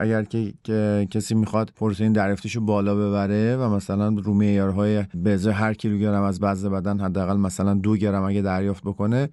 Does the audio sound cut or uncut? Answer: uncut